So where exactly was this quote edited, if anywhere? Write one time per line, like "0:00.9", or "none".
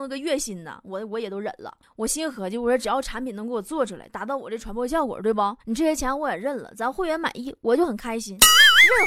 0:01.8
0:05.6